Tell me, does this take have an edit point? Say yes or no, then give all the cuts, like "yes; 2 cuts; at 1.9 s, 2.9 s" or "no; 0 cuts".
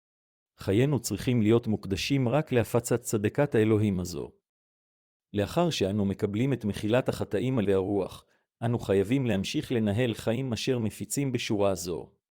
yes; 1 cut; at 7.6 s